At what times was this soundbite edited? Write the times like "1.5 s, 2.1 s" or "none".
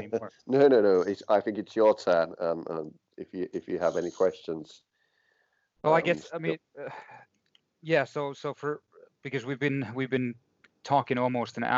none